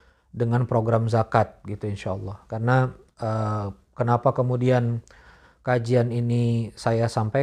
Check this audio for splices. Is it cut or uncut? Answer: uncut